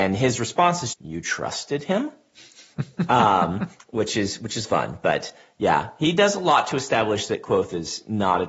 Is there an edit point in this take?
yes; 2 cuts; at 0.9 s, 4.6 s

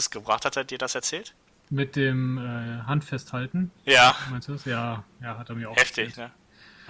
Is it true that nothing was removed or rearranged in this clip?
no; 1 cut; at 3.8 s

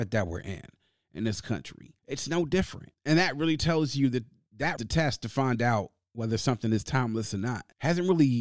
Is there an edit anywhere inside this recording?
yes; 2 cuts; at 2.0 s, 4.8 s

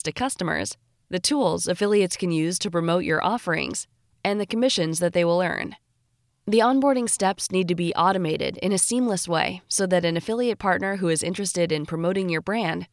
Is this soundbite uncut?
yes; 0 cuts

